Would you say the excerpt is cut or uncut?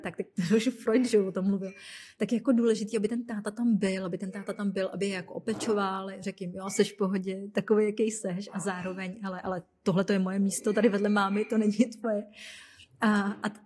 uncut